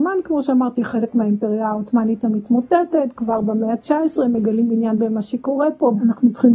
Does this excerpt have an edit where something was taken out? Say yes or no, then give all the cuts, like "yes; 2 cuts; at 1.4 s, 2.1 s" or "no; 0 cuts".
no; 0 cuts